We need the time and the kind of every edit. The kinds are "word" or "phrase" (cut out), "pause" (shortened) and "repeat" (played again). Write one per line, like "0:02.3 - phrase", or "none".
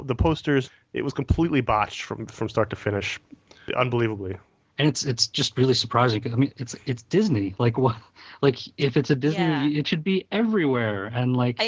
none